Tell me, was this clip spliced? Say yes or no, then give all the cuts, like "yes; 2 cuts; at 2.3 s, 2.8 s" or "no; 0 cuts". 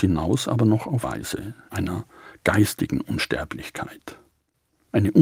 yes; 2 cuts; at 1.0 s, 1.7 s